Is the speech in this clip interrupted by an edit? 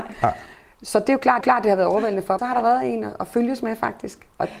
yes; 2 cuts; at 1.4 s, 2.4 s

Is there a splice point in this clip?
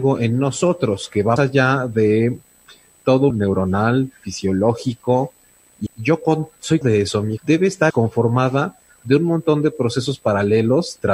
yes; 6 cuts; at 1.4 s, 3.3 s, 5.9 s, 6.8 s, 7.4 s, 7.9 s

